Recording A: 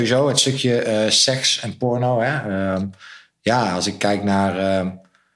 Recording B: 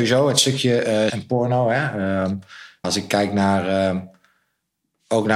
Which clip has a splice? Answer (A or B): B